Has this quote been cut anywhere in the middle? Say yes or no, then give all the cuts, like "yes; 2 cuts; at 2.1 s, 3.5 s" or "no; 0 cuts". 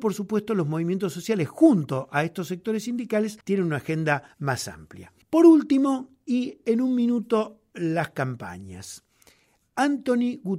yes; 3 cuts; at 3.4 s, 4.3 s, 5.2 s